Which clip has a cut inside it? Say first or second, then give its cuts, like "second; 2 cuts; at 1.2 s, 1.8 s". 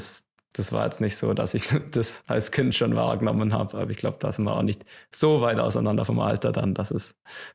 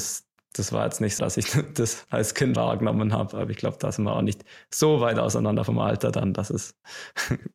second; 2 cuts; at 1.2 s, 2.6 s